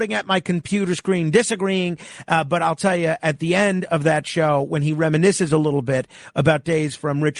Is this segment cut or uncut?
uncut